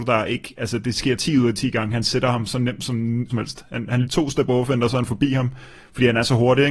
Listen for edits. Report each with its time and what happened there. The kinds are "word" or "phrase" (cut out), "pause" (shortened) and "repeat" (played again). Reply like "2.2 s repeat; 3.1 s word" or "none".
3.3 s phrase; 4.0 s phrase